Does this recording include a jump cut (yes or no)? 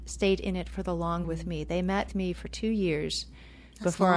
yes